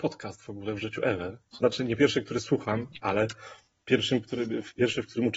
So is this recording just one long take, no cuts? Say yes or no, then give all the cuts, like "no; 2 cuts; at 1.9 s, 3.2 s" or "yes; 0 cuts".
yes; 0 cuts